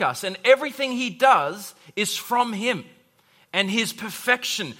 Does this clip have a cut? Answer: no; 0 cuts

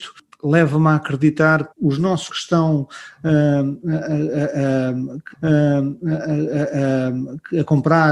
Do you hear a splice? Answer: yes; 3 cuts; at 1.7 s, 2.3 s, 5.3 s

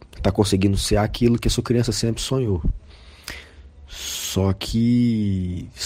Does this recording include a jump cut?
no; 0 cuts

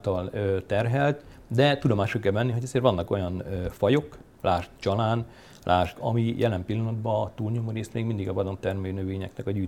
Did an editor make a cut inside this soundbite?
yes; 1 cut; at 6.0 s

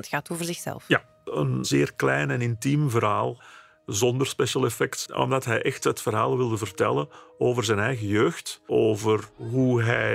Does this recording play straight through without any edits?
yes; 0 cuts

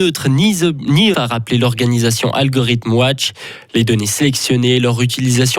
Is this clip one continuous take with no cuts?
no; 1 cut; at 1.1 s

